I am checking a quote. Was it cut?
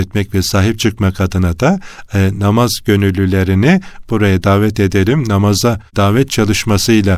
yes; 1 cut; at 5.9 s

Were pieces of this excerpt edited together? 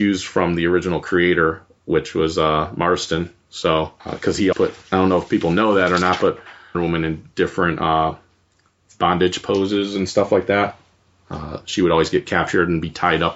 yes; 3 cuts; at 4.0 s, 4.5 s, 6.7 s

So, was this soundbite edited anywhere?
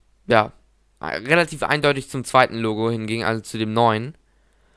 no; 0 cuts

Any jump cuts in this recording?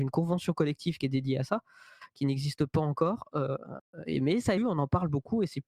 yes; 1 cut; at 4.6 s

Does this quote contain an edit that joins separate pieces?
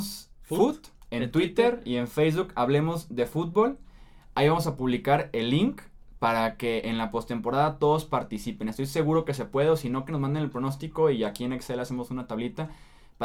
no; 0 cuts

